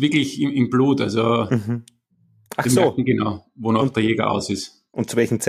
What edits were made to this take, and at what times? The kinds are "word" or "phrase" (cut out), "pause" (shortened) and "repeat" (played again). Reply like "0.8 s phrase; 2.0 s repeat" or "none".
none